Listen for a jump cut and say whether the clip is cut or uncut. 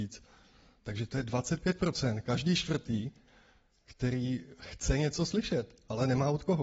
uncut